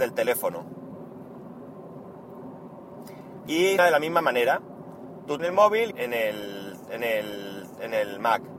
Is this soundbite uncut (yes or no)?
no